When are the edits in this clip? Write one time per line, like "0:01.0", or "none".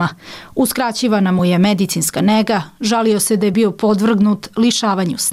none